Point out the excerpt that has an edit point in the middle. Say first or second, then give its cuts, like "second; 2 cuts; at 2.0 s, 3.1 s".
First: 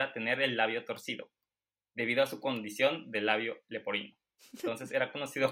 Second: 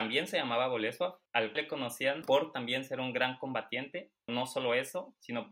second; 2 cuts; at 1.6 s, 4.3 s